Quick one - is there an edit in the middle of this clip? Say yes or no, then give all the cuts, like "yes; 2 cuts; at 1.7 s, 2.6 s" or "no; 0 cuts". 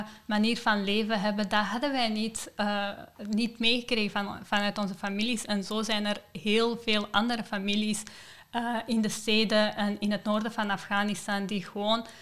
no; 0 cuts